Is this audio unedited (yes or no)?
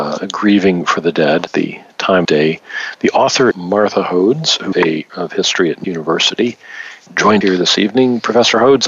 no